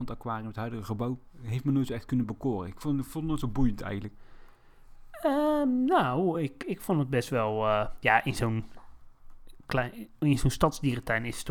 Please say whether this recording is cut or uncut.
uncut